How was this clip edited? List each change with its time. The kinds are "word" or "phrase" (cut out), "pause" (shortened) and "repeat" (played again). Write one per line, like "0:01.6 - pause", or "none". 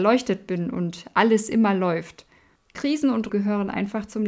0:02.6 - pause
0:03.3 - word

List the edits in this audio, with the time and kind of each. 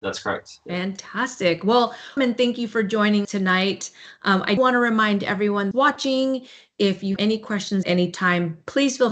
0:02.2 - word
0:03.2 - word
0:04.6 - word
0:05.7 - word
0:07.2 - word
0:07.8 - word

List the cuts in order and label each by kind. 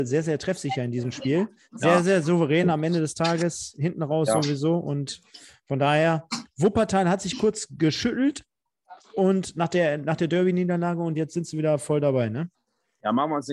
none

